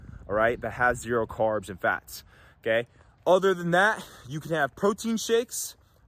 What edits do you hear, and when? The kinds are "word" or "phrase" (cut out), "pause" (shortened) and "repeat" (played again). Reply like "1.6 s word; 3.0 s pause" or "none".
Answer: none